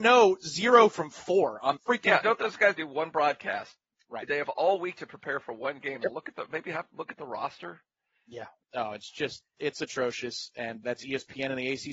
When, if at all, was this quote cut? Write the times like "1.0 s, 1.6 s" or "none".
1.8 s, 2.2 s, 2.8 s, 10.8 s

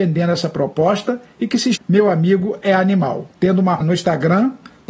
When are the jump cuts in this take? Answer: 1.8 s, 3.4 s, 3.8 s

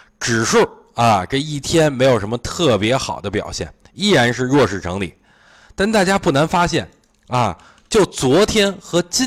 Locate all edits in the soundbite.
none

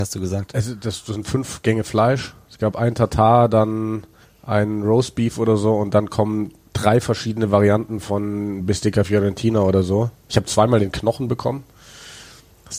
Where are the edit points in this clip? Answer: 4.2 s

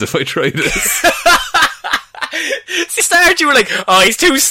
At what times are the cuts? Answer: 3.0 s

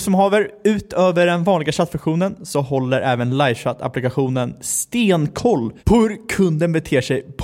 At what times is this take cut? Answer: 5.8 s

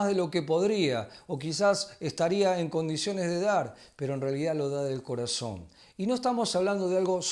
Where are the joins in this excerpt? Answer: none

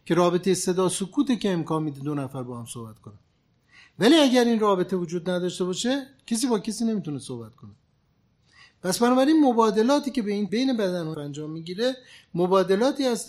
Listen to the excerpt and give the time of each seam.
10.5 s, 11.1 s

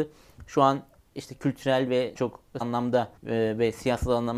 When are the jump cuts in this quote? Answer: 2.2 s, 2.6 s, 3.2 s

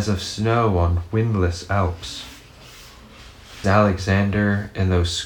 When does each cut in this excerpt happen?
3.6 s

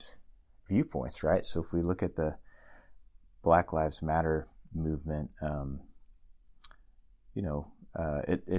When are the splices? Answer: none

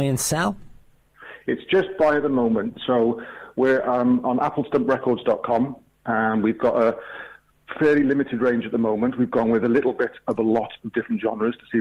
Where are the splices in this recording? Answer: none

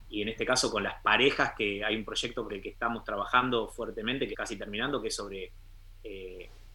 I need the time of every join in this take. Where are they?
2.5 s, 4.3 s

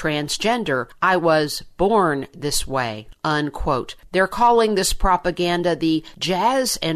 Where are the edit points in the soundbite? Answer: none

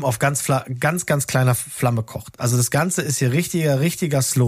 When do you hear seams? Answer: none

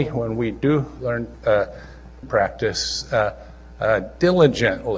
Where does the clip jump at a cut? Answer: 1.3 s, 2.2 s

